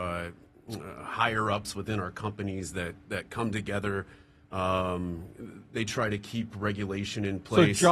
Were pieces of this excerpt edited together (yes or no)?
no